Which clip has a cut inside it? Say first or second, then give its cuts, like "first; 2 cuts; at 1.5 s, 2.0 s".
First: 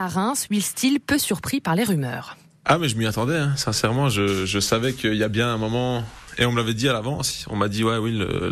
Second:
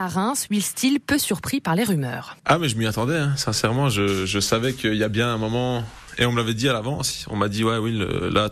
second; 1 cut; at 2.4 s